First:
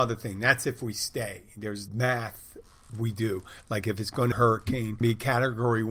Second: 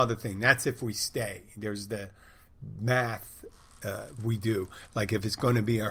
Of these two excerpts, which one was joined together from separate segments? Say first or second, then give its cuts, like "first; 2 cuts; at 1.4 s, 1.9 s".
first; 4 cuts; at 1.9 s, 2.9 s, 4.3 s, 5.0 s